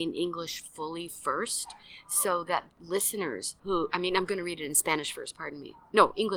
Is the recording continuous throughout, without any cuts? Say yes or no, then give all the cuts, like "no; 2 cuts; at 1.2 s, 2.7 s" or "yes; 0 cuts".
no; 2 cuts; at 2.7 s, 3.6 s